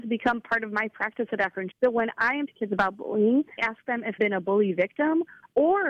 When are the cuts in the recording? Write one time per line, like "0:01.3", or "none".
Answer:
0:01.7
0:02.5
0:03.6
0:04.2